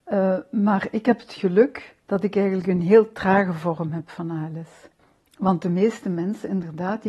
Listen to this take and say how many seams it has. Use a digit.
2